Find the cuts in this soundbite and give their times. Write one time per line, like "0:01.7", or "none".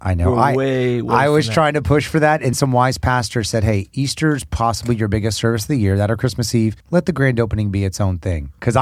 0:02.5
0:06.8